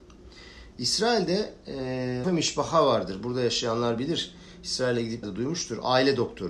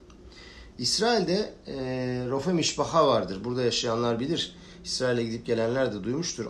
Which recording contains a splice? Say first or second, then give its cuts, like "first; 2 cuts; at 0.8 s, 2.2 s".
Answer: first; 2 cuts; at 2.2 s, 5.2 s